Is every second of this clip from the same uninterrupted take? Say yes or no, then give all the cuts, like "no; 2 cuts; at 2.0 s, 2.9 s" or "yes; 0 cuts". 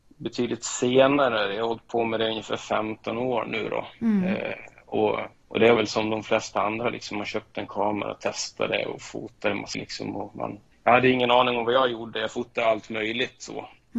no; 4 cuts; at 5.3 s, 5.8 s, 9.7 s, 10.7 s